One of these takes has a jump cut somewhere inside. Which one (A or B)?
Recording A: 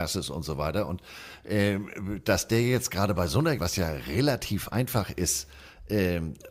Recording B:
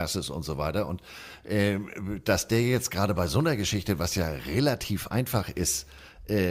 A